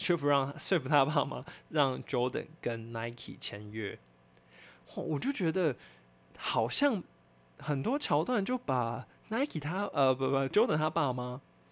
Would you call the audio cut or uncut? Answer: uncut